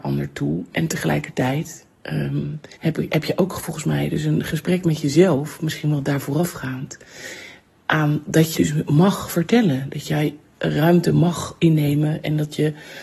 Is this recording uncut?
no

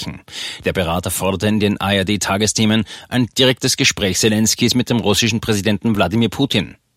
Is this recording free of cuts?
yes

